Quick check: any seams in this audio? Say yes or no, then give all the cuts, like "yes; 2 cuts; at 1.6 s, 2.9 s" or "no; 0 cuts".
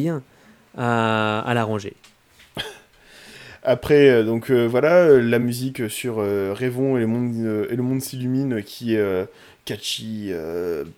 no; 0 cuts